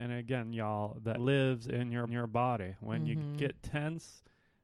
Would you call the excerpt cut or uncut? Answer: cut